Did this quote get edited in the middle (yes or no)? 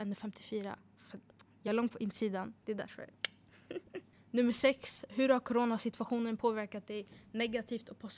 no